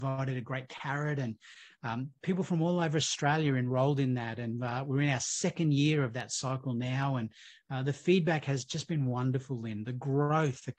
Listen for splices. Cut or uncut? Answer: uncut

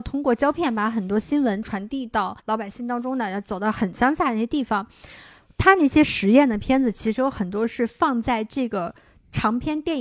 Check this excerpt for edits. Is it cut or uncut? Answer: cut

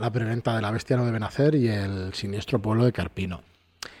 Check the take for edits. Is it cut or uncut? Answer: uncut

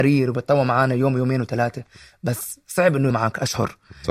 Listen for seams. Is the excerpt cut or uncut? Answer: cut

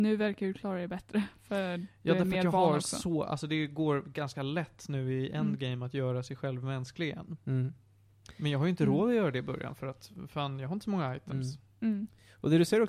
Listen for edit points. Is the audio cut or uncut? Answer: uncut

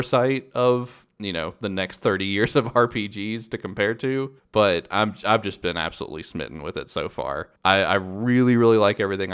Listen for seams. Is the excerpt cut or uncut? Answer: cut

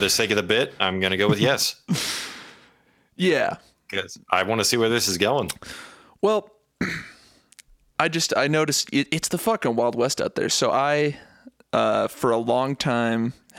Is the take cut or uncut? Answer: uncut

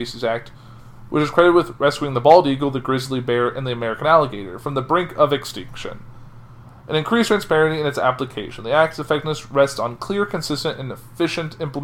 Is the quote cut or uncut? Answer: uncut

